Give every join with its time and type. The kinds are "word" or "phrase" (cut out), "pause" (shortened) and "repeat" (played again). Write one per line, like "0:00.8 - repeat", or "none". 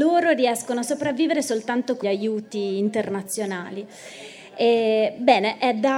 0:02.0 - word